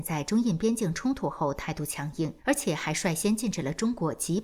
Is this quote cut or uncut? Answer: cut